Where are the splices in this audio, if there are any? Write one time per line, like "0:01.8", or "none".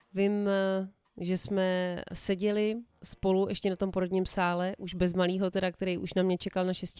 none